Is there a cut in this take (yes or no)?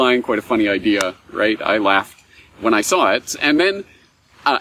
no